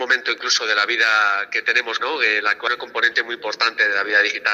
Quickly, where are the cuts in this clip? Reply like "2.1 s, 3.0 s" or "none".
2.0 s, 2.7 s